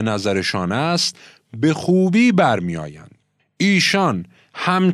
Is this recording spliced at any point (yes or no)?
no